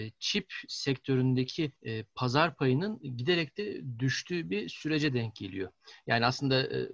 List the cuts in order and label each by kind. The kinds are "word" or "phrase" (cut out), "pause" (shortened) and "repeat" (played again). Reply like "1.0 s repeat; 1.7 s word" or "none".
1.8 s pause